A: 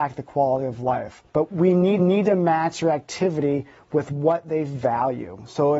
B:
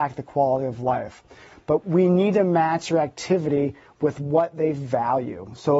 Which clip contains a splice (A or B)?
A